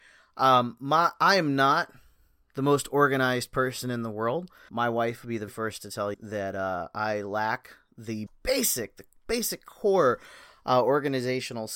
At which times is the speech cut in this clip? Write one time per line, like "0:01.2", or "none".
0:04.7
0:05.5
0:06.1
0:08.3